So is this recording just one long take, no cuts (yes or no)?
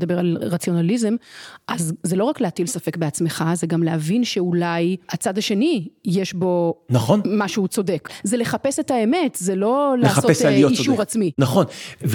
yes